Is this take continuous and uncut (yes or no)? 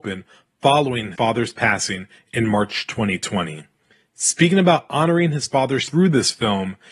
no